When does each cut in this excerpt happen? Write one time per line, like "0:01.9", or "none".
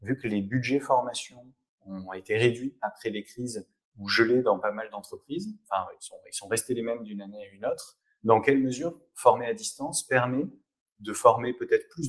none